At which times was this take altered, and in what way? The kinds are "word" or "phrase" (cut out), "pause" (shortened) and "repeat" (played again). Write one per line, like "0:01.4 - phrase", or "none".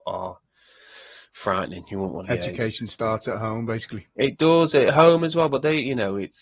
0:02.2 - phrase